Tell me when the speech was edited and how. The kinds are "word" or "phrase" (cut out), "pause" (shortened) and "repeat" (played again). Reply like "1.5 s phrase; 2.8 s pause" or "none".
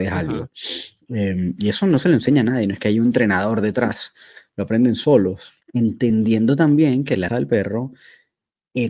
5.6 s pause; 7.3 s word